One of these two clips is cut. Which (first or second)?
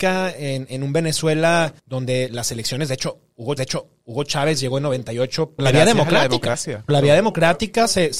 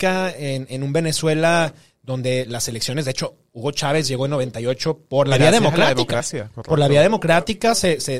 first